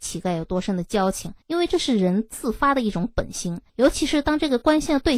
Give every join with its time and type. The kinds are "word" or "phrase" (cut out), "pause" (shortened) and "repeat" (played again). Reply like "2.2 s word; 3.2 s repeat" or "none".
1.4 s pause; 3.7 s pause